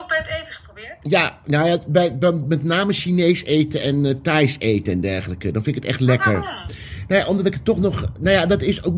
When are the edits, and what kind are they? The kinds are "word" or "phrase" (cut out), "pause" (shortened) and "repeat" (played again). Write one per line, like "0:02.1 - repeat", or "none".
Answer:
none